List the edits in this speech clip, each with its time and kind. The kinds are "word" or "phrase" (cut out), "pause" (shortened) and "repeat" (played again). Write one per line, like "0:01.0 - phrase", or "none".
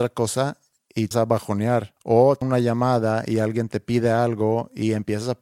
0:01.1 - word
0:02.0 - pause
0:02.4 - word